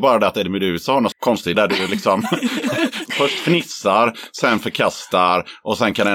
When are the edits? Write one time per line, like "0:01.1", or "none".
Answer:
0:01.1
0:01.5
0:03.1